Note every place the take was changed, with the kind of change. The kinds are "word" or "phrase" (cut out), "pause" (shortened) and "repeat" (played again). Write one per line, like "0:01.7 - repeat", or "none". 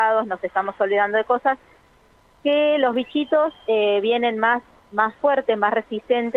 none